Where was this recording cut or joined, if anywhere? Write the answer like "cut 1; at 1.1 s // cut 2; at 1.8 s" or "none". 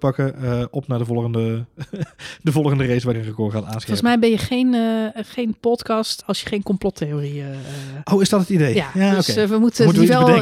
cut 1; at 3.1 s // cut 2; at 6.2 s